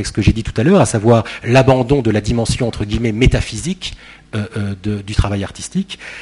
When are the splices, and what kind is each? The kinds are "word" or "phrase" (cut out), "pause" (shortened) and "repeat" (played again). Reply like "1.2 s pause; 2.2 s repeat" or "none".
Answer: none